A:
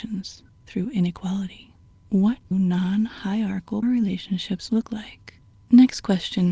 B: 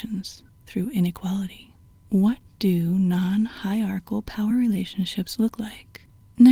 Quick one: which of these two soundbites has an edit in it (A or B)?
A